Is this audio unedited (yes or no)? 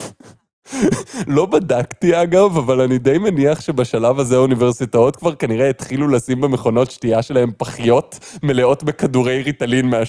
yes